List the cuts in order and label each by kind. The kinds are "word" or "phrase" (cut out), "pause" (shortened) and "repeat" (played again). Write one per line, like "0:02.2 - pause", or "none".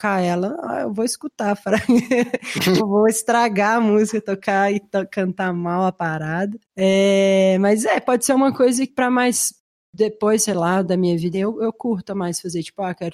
0:02.8 - word
0:06.6 - pause
0:08.9 - word
0:11.3 - word